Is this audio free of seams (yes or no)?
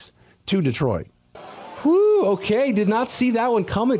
yes